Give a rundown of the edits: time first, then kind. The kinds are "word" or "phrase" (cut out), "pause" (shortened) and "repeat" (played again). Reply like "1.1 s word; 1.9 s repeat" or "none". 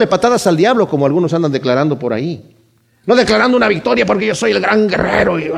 none